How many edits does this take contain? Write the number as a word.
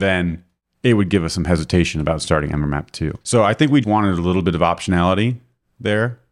two